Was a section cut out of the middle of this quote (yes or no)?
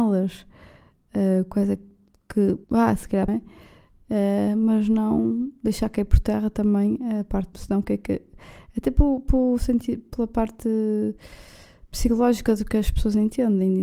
yes